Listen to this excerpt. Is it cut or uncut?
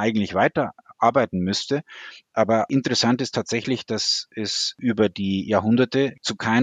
uncut